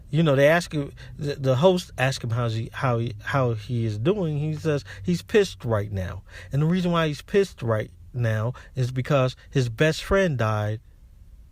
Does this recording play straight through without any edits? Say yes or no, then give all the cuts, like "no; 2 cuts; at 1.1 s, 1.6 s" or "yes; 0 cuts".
yes; 0 cuts